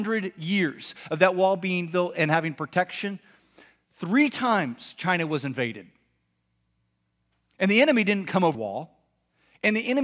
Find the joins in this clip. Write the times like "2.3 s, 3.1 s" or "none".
8.5 s